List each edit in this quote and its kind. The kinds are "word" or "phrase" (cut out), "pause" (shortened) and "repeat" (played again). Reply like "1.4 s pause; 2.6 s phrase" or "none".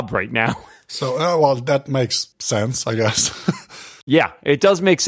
2.3 s pause